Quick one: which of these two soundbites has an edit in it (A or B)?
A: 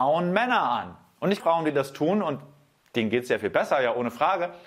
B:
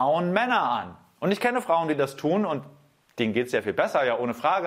A